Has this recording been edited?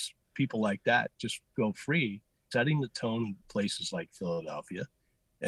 yes; 3 cuts; at 1.5 s, 2.5 s, 3.4 s

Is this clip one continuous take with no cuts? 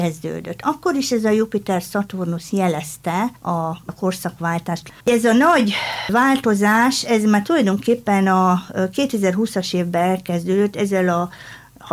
no; 2 cuts; at 3.4 s, 5.0 s

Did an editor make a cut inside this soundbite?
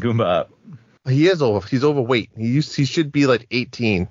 no; 0 cuts

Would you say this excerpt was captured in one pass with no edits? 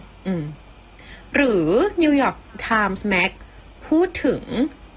yes; 0 cuts

